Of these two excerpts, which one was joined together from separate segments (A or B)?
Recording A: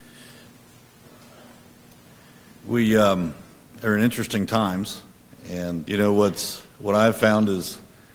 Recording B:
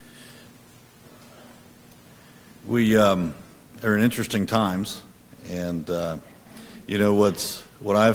A